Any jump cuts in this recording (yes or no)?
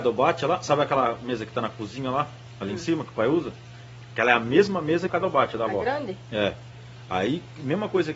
yes